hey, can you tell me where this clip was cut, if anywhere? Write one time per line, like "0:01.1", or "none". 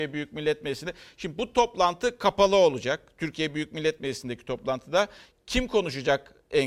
none